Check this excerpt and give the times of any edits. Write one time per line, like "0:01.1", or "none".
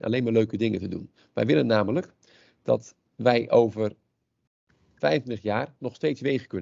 none

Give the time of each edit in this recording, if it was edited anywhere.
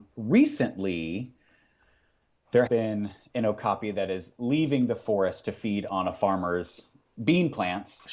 0:02.7

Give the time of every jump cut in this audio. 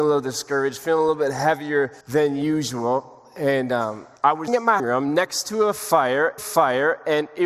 0:02.0
0:04.2
0:04.5
0:04.8
0:06.4

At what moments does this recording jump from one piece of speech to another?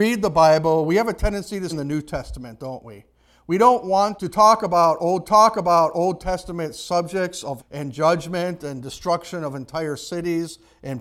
0:01.7
0:04.2
0:05.2
0:07.6

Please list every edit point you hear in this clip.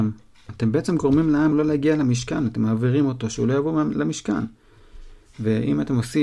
none

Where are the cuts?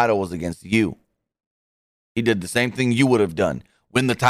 none

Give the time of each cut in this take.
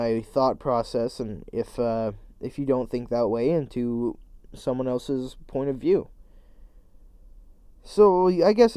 none

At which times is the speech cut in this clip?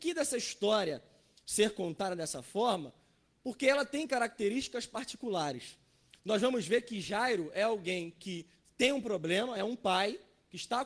none

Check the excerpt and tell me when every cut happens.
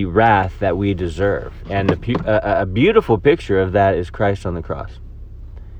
none

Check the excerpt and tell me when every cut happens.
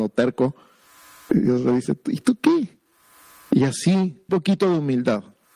0:04.3

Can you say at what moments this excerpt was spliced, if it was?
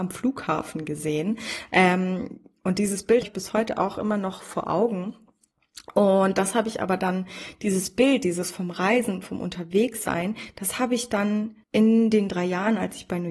0:03.2
0:11.6

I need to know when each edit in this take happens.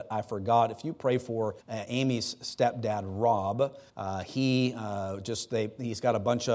0:01.6
0:03.9

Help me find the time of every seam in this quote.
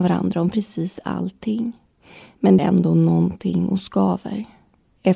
0:02.6

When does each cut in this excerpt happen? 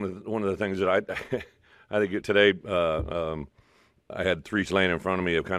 0:02.2
0:04.1
0:04.6

